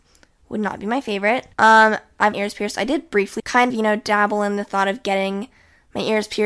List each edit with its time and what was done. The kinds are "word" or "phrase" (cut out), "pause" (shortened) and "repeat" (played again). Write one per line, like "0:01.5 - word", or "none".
0:01.5 - pause
0:02.3 - phrase
0:03.4 - word
0:03.7 - word